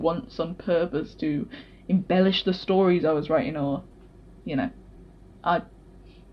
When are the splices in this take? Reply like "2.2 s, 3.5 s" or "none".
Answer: none